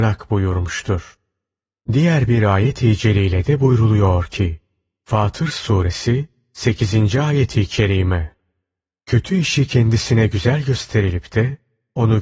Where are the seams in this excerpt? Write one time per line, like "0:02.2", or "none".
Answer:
none